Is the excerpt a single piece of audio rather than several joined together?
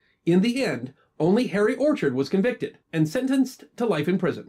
no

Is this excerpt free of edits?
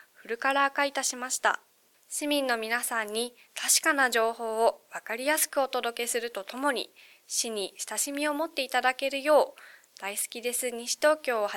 yes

